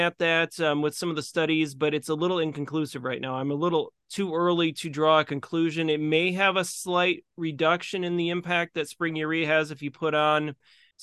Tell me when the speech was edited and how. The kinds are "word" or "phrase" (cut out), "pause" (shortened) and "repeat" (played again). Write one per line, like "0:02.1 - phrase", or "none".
0:04.0 - pause